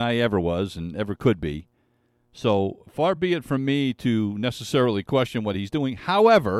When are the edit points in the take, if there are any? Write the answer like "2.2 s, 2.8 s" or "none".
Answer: none